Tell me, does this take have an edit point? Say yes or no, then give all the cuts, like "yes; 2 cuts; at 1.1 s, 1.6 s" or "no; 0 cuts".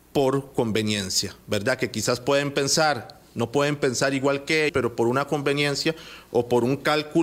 yes; 1 cut; at 4.7 s